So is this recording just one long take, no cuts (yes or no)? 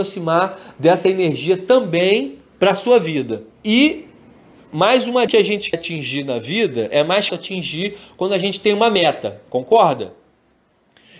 no